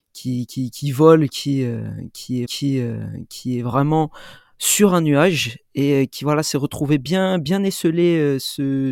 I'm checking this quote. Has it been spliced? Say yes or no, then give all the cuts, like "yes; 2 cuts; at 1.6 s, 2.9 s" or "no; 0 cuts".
yes; 1 cut; at 2.5 s